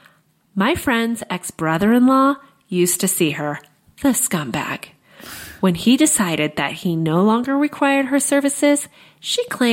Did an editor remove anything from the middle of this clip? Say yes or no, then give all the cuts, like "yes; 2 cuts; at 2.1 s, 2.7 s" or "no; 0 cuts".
no; 0 cuts